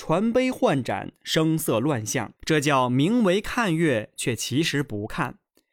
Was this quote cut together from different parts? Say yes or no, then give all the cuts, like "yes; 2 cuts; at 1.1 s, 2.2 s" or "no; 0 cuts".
yes; 1 cut; at 2.4 s